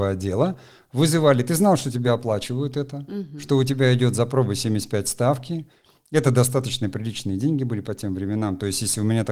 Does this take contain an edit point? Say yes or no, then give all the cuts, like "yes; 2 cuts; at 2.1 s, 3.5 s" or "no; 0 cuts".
no; 0 cuts